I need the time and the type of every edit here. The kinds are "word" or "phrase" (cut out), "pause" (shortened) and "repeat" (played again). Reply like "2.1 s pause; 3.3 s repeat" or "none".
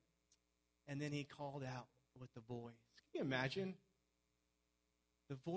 none